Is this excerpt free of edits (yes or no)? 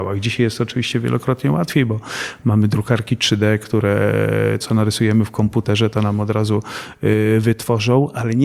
no